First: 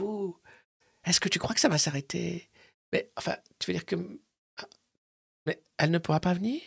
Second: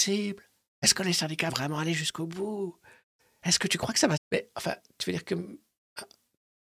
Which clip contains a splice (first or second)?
second